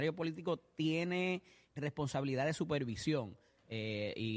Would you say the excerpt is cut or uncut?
cut